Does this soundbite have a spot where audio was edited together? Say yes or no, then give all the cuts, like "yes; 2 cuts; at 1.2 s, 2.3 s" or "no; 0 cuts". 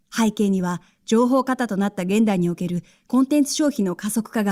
no; 0 cuts